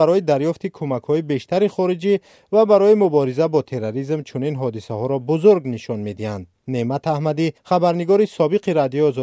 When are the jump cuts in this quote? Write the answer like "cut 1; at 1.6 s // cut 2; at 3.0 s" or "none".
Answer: cut 1; at 6.6 s // cut 2; at 7.6 s

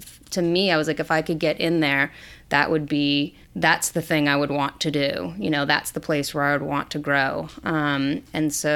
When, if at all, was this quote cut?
cut 1; at 3.4 s

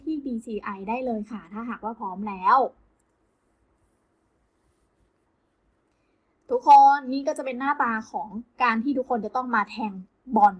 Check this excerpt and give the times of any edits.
none

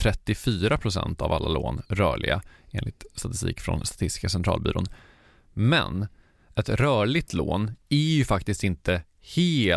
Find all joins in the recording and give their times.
none

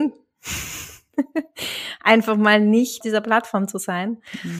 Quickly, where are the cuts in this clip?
cut 1; at 3.0 s

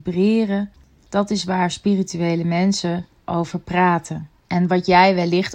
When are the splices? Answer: none

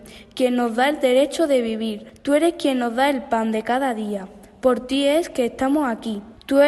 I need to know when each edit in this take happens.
none

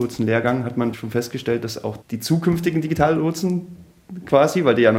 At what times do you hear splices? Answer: cut 1; at 0.9 s

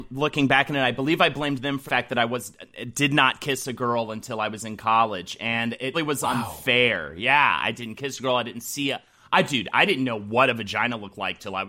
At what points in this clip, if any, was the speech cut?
cut 1; at 1.9 s // cut 2; at 5.9 s

